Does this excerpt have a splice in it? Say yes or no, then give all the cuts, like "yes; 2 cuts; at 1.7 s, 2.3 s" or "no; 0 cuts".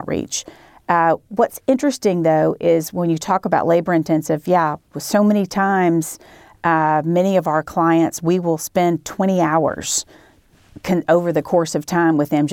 no; 0 cuts